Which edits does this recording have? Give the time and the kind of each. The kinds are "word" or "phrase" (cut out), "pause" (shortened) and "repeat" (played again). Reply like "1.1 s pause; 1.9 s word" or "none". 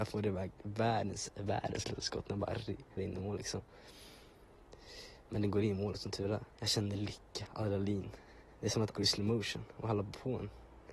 3.0 s word; 6.5 s pause; 8.9 s word